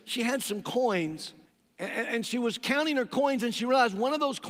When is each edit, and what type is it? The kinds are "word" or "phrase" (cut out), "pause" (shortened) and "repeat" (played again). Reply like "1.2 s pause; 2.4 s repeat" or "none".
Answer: 1.5 s pause